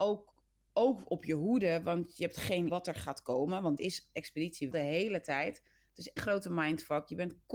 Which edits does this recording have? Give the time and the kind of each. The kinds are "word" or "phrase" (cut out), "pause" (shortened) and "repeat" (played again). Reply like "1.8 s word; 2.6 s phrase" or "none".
2.7 s word; 3.8 s word; 4.7 s word; 6.2 s word